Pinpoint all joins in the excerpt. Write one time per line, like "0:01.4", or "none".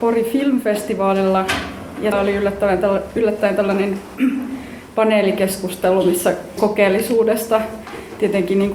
0:02.1
0:06.6